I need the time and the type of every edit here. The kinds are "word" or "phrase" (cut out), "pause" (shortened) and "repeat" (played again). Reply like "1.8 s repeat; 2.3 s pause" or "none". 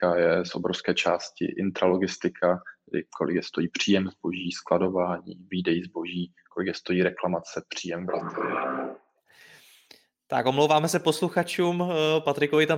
none